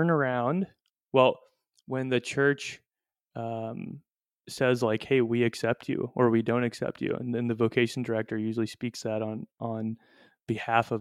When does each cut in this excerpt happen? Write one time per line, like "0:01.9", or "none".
none